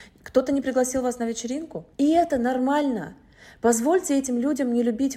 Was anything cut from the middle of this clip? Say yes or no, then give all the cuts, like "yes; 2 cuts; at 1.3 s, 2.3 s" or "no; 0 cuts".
yes; 1 cut; at 1.9 s